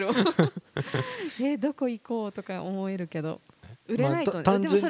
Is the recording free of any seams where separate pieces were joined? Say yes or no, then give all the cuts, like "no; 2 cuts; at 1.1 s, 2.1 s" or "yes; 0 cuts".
no; 1 cut; at 3.8 s